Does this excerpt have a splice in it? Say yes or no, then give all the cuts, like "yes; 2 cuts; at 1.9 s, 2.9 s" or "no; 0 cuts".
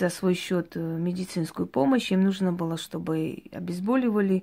no; 0 cuts